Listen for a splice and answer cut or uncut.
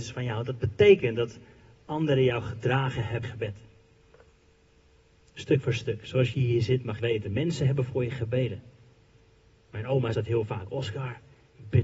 cut